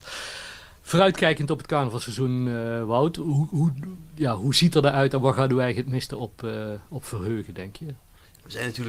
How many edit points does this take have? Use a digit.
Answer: 0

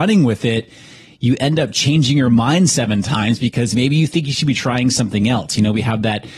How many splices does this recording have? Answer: 0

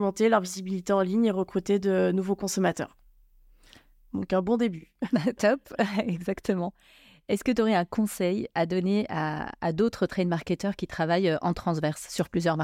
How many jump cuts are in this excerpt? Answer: 0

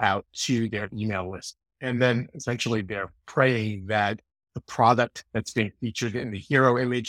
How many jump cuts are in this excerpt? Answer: 0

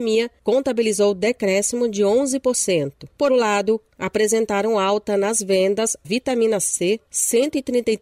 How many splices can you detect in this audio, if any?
2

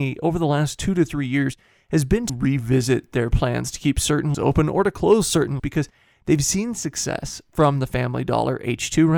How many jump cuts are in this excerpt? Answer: 3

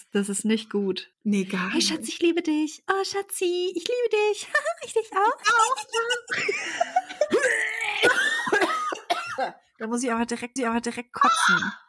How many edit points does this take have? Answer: 2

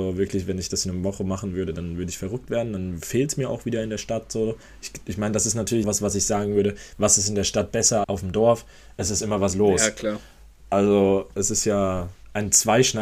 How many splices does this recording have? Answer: 2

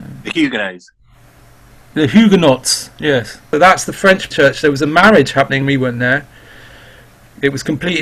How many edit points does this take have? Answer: 2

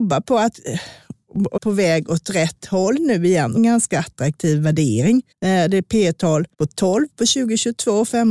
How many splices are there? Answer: 4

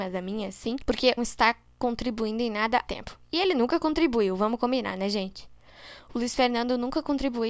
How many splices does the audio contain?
2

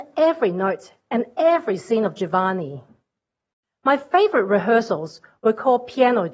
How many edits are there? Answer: 1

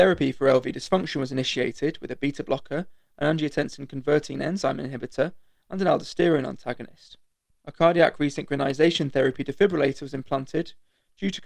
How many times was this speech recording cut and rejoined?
1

